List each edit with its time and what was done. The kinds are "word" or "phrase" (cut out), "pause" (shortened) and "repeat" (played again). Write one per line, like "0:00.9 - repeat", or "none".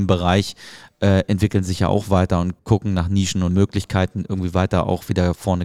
0:02.6 - pause
0:03.5 - word